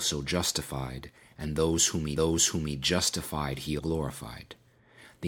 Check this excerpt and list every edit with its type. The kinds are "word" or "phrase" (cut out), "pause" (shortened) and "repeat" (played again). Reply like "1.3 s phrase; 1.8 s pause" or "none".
2.2 s repeat; 3.8 s word